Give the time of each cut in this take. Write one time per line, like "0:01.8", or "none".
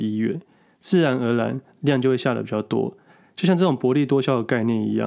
none

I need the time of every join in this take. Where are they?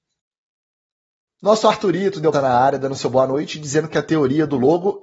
0:02.3

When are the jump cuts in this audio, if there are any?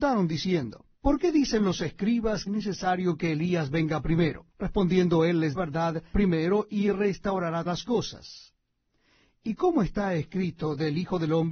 0:00.9
0:02.5
0:04.5
0:05.5
0:06.1
0:07.7

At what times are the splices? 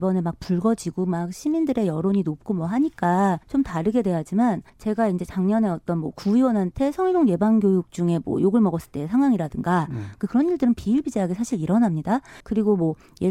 0:03.4
0:04.7
0:12.4

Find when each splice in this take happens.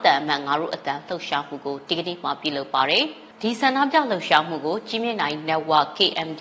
0:03.3

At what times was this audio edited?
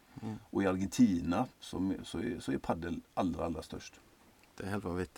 0:01.5

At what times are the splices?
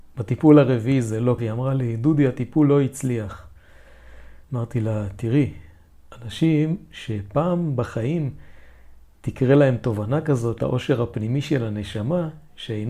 0:01.4
0:04.4
0:06.9
0:10.6

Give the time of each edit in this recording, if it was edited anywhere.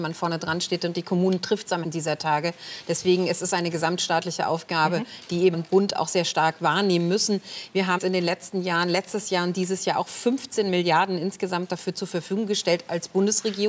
0:01.8
0:05.5
0:08.0

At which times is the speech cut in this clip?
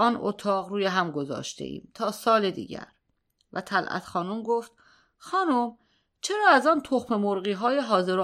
none

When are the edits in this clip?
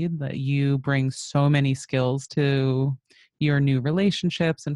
none

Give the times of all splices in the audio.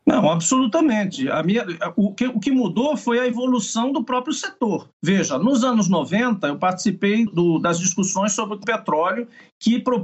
0:04.9
0:07.3
0:08.6

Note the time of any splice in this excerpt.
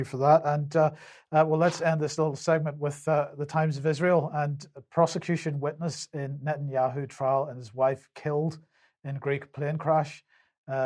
none

